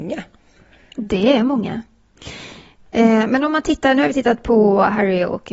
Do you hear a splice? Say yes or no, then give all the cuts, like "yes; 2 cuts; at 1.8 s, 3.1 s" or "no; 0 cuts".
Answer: no; 0 cuts